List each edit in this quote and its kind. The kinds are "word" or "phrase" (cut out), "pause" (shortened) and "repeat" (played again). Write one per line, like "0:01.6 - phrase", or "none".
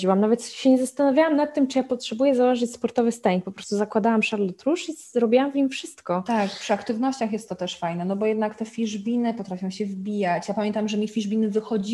none